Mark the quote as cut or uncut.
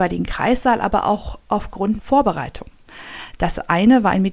cut